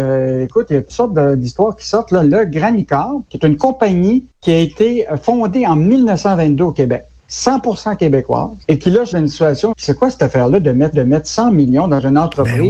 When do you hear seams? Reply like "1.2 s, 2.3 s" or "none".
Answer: 3.3 s, 4.3 s, 8.6 s, 9.1 s, 9.7 s, 10.9 s

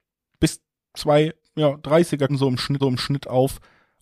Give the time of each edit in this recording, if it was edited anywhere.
2.3 s, 2.8 s

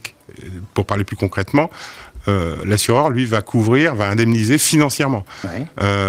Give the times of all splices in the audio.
none

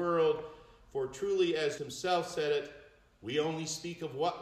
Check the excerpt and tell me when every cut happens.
1.8 s

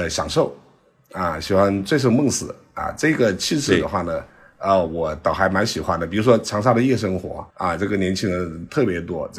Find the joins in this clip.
7.5 s

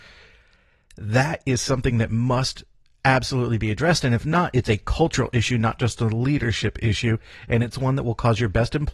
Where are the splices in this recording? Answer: none

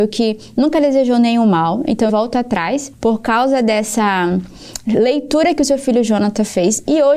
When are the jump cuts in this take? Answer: 2.1 s, 2.9 s

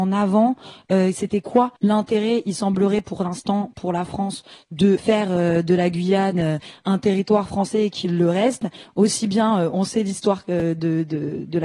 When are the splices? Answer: 1.8 s, 5.0 s

